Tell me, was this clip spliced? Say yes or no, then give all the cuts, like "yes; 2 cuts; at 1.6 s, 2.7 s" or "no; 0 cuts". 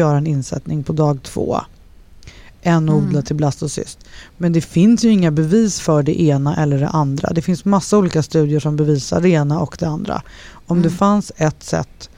no; 0 cuts